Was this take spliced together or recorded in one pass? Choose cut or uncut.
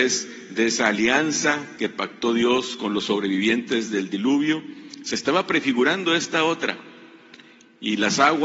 uncut